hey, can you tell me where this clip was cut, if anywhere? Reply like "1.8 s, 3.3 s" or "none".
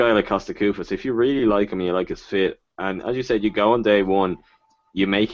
none